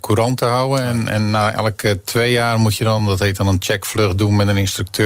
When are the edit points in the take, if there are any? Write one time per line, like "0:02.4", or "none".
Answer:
none